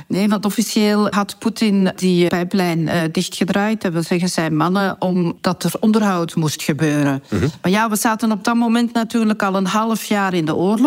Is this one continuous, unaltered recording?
no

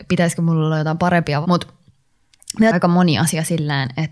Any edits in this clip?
yes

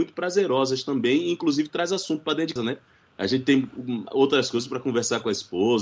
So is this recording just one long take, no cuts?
no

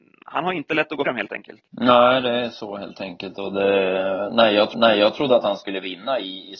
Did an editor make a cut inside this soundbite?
yes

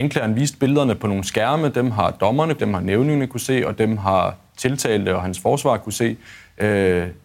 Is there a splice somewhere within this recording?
yes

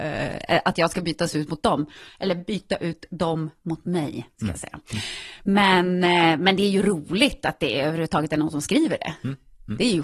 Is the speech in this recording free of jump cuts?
yes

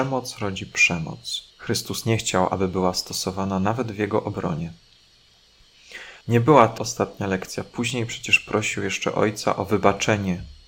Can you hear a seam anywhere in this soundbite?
yes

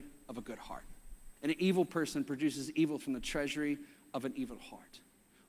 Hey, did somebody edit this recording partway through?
yes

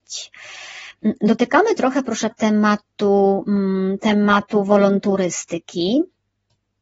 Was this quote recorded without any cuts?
no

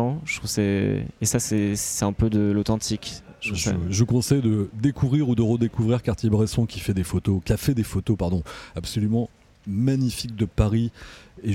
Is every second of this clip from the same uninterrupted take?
yes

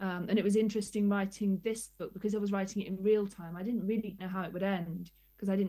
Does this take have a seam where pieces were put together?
yes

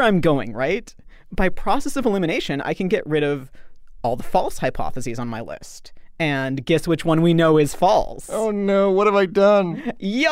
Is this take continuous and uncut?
yes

